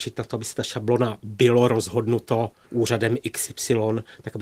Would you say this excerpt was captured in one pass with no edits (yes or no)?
yes